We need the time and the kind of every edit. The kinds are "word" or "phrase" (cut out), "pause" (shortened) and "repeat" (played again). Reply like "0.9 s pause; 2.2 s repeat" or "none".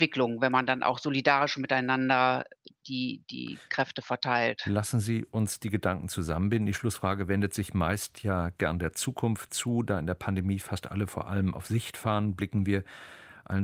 none